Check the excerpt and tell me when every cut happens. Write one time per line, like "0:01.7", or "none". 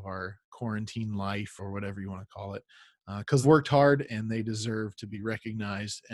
0:01.6
0:03.4